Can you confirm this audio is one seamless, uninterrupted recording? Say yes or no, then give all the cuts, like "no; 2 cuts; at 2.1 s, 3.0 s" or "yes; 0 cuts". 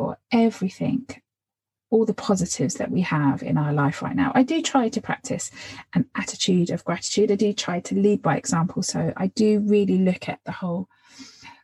yes; 0 cuts